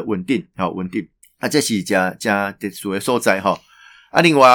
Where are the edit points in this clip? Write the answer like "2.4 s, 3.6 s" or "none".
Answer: 1.2 s